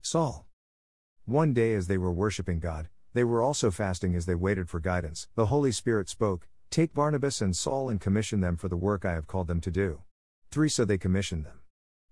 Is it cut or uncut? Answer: cut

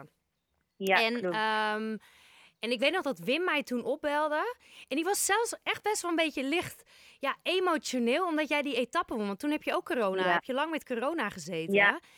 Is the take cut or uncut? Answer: uncut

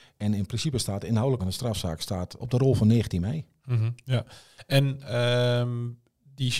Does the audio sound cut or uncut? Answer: cut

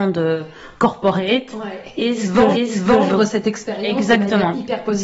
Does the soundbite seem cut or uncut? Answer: cut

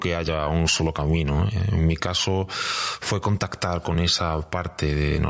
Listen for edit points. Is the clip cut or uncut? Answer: uncut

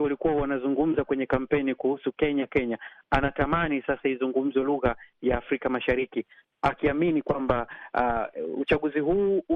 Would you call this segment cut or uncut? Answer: uncut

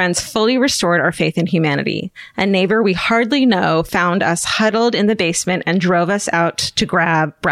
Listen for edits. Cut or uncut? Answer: uncut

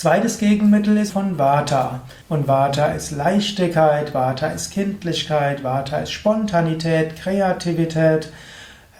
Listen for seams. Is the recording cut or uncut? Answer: cut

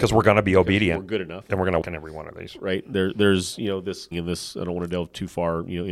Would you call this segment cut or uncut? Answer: cut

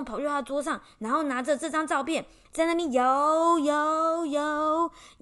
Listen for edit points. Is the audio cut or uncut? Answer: uncut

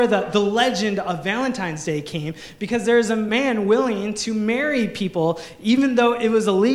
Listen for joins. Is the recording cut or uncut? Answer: uncut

